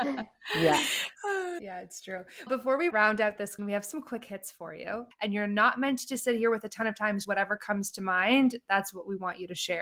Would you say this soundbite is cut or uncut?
cut